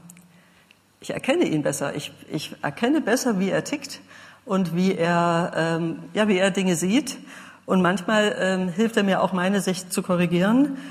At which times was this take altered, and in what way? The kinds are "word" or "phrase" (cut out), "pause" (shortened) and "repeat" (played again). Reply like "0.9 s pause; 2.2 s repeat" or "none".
none